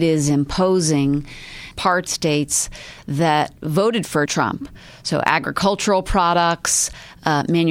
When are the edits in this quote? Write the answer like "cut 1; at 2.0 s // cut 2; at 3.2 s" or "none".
cut 1; at 1.7 s // cut 2; at 2.1 s // cut 3; at 4.3 s